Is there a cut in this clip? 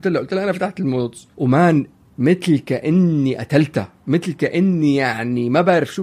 yes; 1 cut; at 1.3 s

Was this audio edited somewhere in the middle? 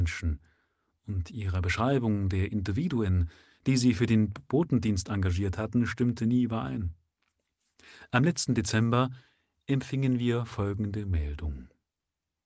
no; 0 cuts

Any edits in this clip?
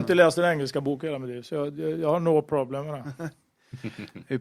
no; 0 cuts

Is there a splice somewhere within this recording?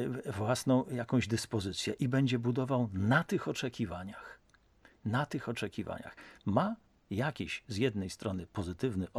no; 0 cuts

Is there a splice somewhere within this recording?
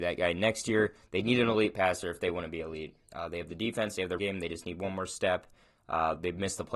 yes; 1 cut; at 4.2 s

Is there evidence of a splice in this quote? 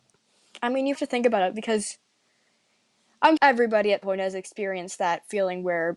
yes; 3 cuts; at 1.0 s, 3.4 s, 4.0 s

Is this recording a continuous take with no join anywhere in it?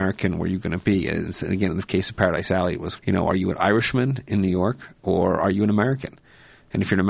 no; 1 cut; at 3.0 s

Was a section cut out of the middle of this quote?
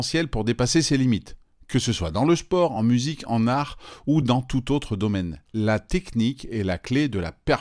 no; 0 cuts

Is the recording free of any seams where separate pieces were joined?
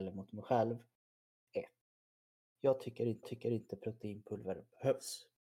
no; 1 cut; at 3.2 s

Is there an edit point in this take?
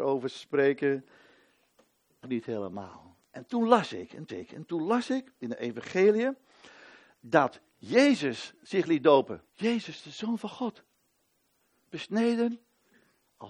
yes; 4 cuts; at 2.2 s, 4.3 s, 7.7 s, 9.5 s

